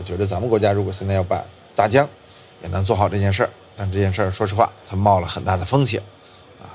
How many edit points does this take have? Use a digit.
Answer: 0